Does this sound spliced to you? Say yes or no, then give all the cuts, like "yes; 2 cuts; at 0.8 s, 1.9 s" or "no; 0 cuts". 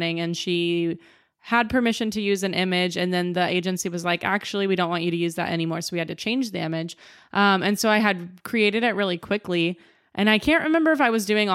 no; 0 cuts